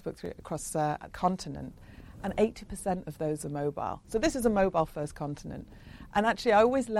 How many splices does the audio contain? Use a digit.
1